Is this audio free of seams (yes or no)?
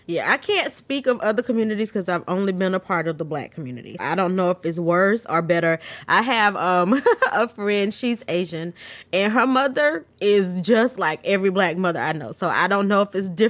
no